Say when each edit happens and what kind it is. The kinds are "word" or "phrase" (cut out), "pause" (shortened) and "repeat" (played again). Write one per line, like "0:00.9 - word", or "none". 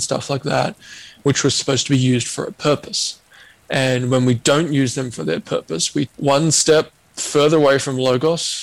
0:06.1 - word